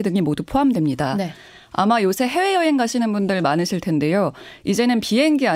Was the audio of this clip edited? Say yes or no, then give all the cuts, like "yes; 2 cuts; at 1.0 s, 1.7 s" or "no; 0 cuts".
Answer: no; 0 cuts